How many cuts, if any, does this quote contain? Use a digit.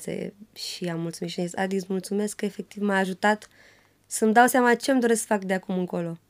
0